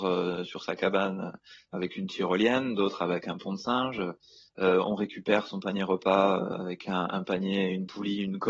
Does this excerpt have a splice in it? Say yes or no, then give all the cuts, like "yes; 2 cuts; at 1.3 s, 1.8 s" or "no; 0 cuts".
no; 0 cuts